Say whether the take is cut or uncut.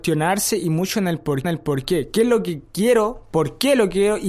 cut